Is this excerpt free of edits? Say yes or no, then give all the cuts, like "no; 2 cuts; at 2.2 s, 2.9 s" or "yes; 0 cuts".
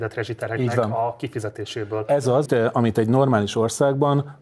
no; 1 cut; at 2.5 s